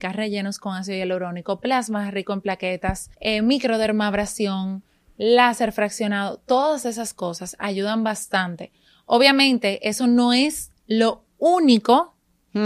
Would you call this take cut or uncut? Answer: cut